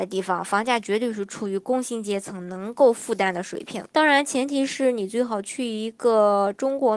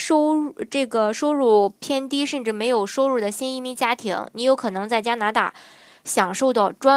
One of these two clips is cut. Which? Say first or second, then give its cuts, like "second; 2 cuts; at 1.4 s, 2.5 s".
first; 1 cut; at 3.9 s